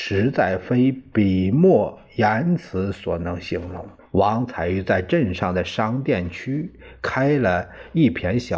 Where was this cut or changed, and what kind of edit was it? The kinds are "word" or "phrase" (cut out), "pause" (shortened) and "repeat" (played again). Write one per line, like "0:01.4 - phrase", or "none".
0:04.0 - pause